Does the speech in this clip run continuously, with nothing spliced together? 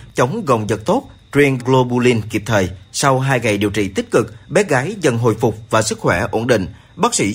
no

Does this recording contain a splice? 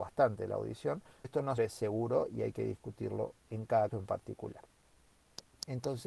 yes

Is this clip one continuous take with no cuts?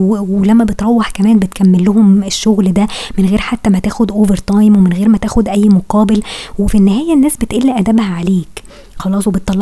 yes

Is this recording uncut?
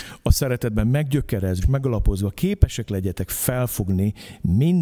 no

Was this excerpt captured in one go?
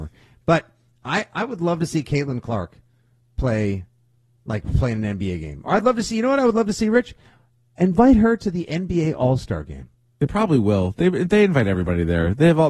yes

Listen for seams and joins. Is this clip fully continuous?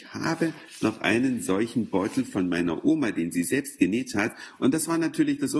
yes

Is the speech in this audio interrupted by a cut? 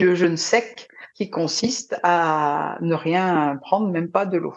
yes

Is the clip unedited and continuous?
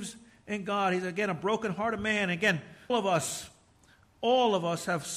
no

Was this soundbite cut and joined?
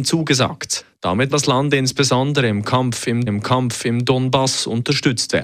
yes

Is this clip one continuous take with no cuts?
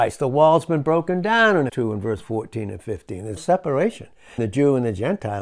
no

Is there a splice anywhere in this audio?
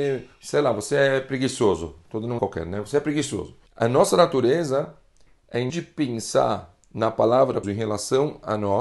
yes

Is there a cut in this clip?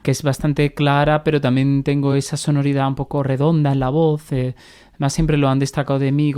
no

